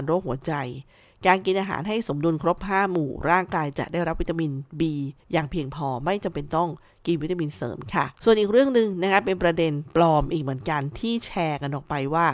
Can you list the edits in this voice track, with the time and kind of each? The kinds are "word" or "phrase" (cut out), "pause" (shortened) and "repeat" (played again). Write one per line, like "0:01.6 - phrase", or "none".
0:05.2 - pause
0:08.1 - pause

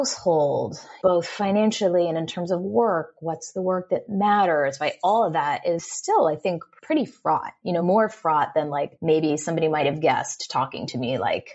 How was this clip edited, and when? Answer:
none

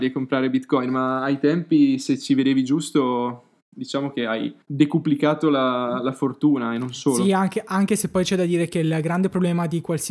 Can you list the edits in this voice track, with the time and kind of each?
0:04.6 - pause

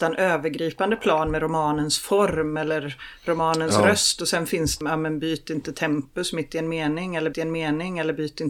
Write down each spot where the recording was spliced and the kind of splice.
0:04.8 - word
0:07.3 - repeat

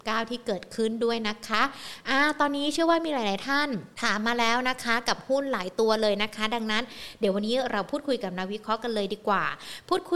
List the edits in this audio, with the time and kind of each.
0:03.9 - pause

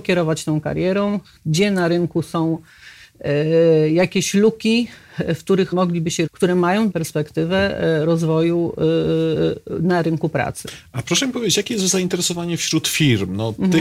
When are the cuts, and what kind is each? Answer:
0:05.7 - word
0:06.3 - word
0:06.9 - word

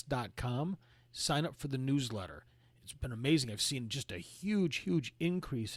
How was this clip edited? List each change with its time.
none

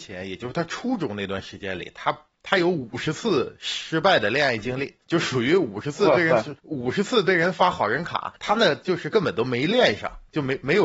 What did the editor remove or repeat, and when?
0:05.0 - pause
0:06.6 - pause
0:08.4 - pause

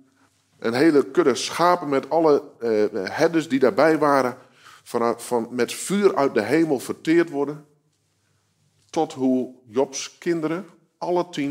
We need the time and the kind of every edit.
none

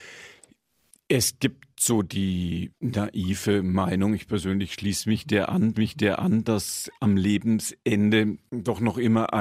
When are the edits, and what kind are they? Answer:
0:05.7 - repeat

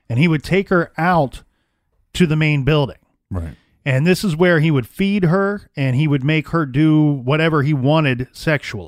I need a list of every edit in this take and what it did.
none

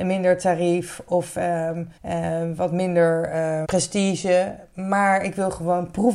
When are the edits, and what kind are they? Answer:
0:02.0 - pause
0:03.6 - word

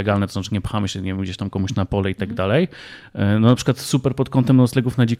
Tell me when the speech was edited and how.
none

